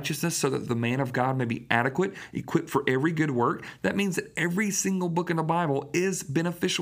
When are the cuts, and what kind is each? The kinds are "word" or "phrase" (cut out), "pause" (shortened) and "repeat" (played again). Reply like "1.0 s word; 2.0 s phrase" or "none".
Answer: none